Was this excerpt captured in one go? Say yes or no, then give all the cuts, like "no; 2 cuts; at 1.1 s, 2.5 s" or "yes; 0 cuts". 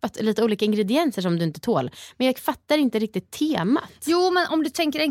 yes; 0 cuts